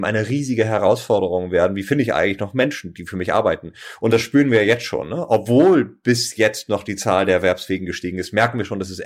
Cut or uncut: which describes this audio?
uncut